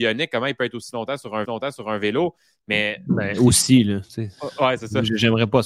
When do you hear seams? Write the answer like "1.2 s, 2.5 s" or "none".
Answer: 1.4 s